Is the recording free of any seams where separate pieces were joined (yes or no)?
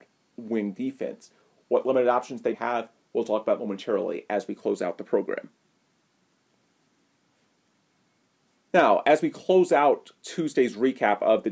no